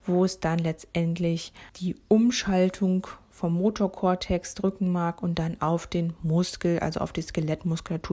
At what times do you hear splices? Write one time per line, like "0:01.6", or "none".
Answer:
0:01.7